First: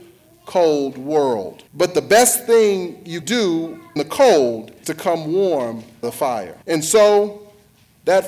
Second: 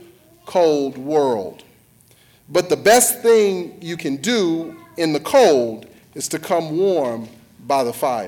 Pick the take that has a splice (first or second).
first